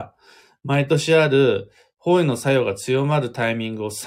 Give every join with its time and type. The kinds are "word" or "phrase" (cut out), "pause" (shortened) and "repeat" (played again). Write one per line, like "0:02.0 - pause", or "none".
none